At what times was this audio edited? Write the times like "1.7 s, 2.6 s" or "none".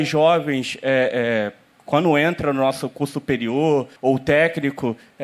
4.0 s